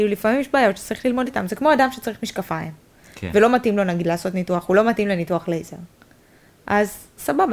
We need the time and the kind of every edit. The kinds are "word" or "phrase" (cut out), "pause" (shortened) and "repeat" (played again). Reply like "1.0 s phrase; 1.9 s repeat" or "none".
1.3 s word